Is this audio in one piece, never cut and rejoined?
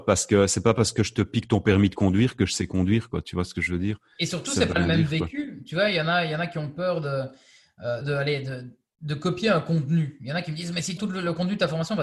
no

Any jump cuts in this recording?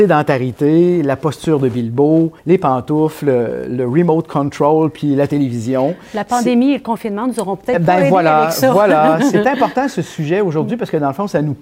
yes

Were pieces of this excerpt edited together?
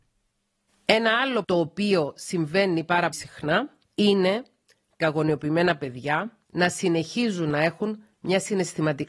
yes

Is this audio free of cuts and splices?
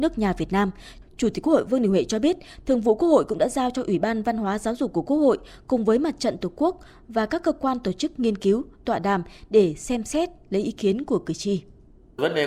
yes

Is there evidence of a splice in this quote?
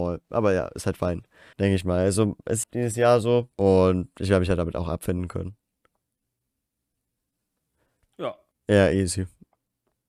yes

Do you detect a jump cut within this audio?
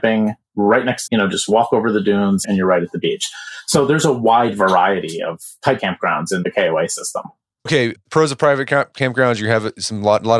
yes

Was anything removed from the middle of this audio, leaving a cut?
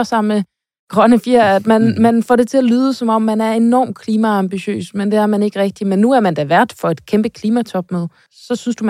no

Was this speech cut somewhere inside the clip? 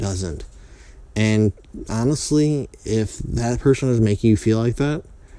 no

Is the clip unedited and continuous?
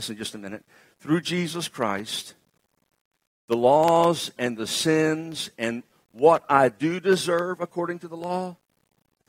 yes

